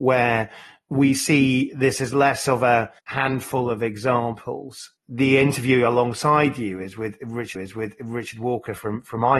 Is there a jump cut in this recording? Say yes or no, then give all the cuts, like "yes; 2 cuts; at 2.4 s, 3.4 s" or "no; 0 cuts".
yes; 3 cuts; at 3.0 s, 5.0 s, 7.6 s